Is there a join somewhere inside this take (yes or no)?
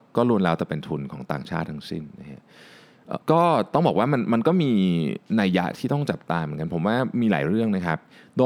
yes